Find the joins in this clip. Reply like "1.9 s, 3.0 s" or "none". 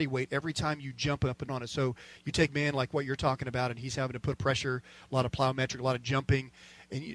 1.5 s, 2.5 s, 4.3 s